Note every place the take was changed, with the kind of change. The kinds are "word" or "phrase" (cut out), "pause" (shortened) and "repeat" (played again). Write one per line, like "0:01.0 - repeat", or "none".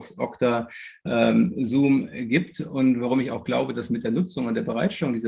none